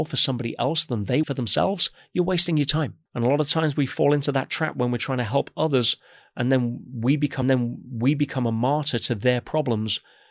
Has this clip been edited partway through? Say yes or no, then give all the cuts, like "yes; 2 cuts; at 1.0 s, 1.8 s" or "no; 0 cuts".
yes; 3 cuts; at 1.2 s, 3.1 s, 7.4 s